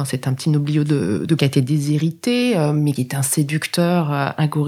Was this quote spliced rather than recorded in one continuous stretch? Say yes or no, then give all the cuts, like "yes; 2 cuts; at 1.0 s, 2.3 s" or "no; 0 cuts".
yes; 2 cuts; at 1.4 s, 3.0 s